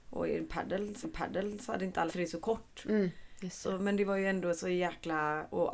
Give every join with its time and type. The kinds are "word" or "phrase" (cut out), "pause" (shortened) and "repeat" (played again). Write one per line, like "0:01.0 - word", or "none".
0:01.0 - repeat
0:02.1 - word